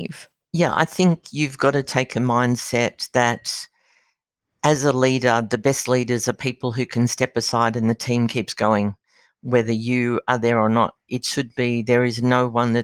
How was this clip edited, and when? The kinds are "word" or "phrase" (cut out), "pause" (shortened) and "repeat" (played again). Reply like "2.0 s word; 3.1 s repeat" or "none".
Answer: 11.0 s pause